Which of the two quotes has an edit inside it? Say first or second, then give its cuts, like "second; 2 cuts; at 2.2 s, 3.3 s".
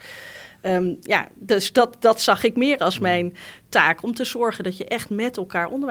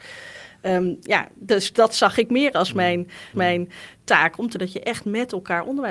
second; 3 cuts; at 1.7 s, 3.3 s, 4.5 s